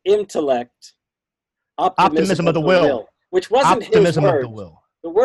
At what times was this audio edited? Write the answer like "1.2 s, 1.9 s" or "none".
none